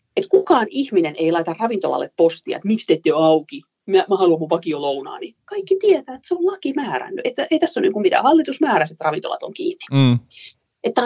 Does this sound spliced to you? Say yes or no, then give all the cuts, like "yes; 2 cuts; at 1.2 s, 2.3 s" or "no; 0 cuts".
no; 0 cuts